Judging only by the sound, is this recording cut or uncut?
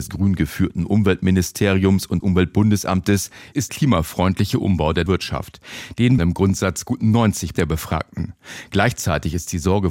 cut